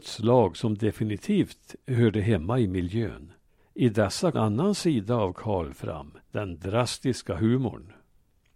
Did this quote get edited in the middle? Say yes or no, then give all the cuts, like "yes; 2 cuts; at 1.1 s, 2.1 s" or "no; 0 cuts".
yes; 3 cuts; at 3.5 s, 4.3 s, 6.2 s